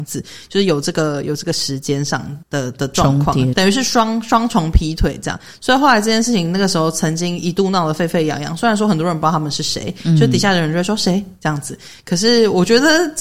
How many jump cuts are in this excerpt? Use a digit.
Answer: 2